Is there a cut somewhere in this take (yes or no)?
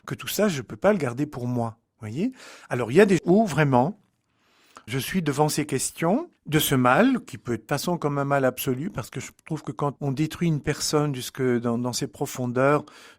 yes